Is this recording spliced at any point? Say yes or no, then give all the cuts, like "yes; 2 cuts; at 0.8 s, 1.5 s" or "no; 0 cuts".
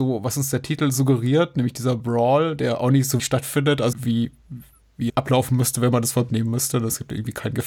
yes; 4 cuts; at 3.2 s, 3.9 s, 5.1 s, 6.3 s